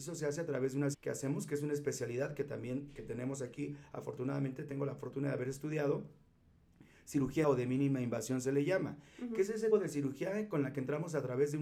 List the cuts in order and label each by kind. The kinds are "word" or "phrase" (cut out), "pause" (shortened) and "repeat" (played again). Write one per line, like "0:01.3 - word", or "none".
0:00.9 - word
0:07.4 - word
0:09.7 - word